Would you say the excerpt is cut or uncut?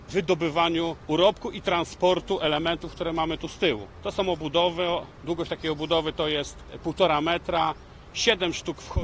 uncut